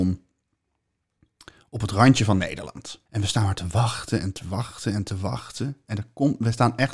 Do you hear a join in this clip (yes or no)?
yes